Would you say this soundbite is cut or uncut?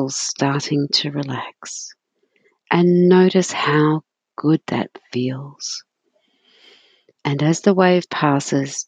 uncut